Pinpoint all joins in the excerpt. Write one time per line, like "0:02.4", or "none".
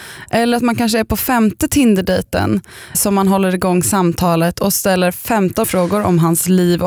0:02.9
0:05.6